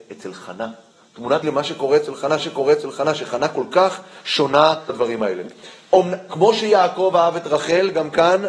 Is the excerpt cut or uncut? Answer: cut